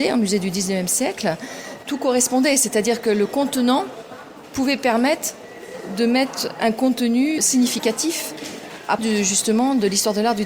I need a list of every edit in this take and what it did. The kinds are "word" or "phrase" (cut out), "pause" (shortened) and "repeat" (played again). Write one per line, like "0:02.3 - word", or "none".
0:06.6 - word
0:07.4 - word
0:09.0 - word